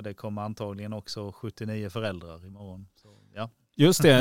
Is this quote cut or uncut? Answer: uncut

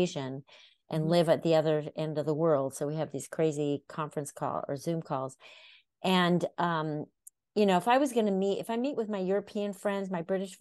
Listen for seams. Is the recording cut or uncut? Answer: uncut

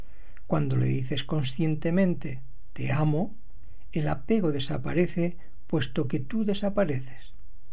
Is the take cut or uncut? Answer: uncut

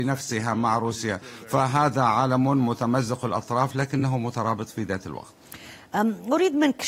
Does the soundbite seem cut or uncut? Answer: uncut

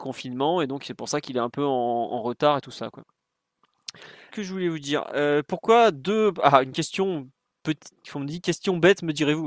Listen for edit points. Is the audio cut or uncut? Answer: cut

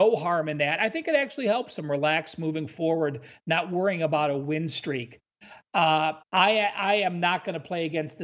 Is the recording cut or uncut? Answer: cut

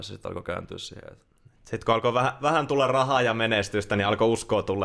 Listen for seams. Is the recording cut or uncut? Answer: uncut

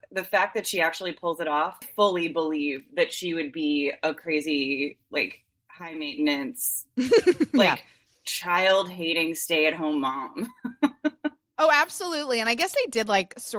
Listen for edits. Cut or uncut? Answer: cut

